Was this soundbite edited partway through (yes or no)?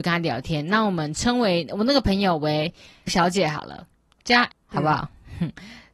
yes